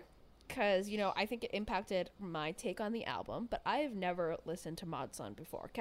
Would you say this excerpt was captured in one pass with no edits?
yes; 0 cuts

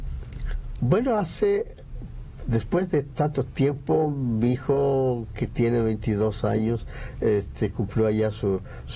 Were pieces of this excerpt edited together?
no; 0 cuts

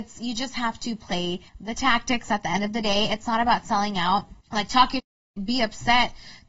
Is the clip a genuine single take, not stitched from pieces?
no; 2 cuts; at 1.5 s, 4.4 s

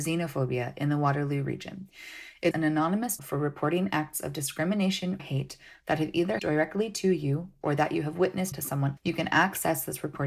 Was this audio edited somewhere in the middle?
yes; 6 cuts; at 2.5 s, 3.2 s, 5.2 s, 6.4 s, 8.5 s, 9.0 s

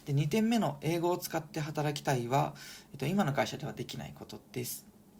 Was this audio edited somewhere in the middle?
no; 0 cuts

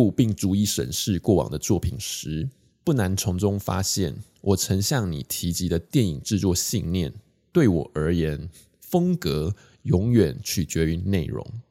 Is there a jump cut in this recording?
no; 0 cuts

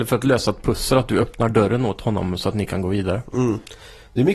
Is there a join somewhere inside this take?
no; 0 cuts

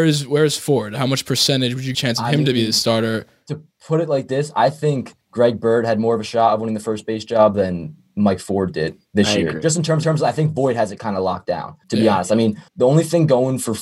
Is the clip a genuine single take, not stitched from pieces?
no; 5 cuts; at 1.9 s, 5.2 s, 10.0 s, 11.8 s, 12.7 s

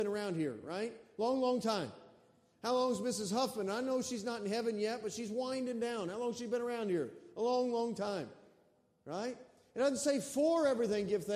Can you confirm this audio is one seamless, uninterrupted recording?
yes; 0 cuts

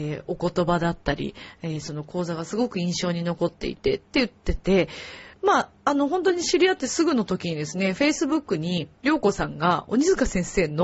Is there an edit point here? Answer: yes; 3 cuts; at 4.1 s, 5.3 s, 9.0 s

